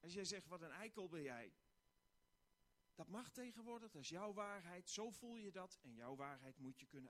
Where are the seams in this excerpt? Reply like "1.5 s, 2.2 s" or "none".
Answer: none